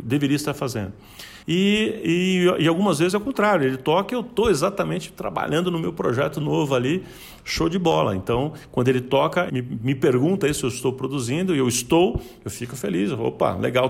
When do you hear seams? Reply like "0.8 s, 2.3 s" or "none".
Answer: 1.4 s, 9.5 s